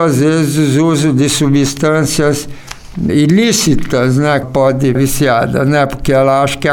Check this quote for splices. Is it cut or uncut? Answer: cut